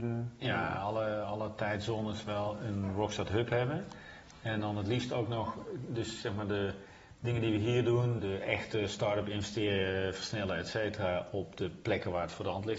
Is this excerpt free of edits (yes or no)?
no